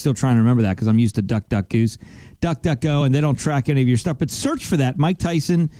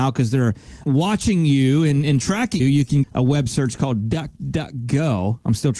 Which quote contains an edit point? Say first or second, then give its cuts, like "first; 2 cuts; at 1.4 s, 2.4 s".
second; 2 cuts; at 2.6 s, 3.0 s